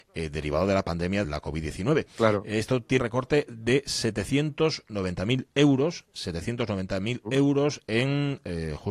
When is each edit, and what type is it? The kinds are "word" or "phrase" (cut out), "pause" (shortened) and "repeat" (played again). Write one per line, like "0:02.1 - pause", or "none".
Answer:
0:01.2 - word
0:03.0 - phrase